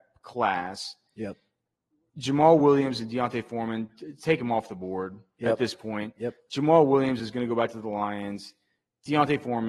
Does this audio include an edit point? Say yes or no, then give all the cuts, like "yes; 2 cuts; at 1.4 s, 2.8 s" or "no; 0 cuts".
no; 0 cuts